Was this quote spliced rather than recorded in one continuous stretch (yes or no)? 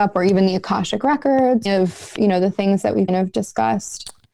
yes